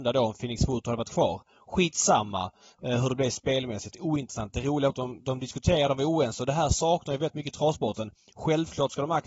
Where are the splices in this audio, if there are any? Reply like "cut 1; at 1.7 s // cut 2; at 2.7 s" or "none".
cut 1; at 4.9 s